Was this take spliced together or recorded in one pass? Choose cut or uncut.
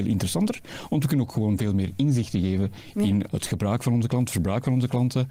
uncut